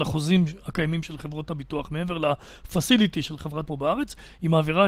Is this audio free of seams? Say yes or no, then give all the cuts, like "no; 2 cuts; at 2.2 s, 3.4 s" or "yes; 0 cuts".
no; 1 cut; at 3.7 s